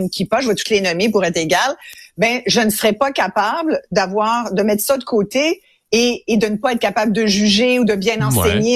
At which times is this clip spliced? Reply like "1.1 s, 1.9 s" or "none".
none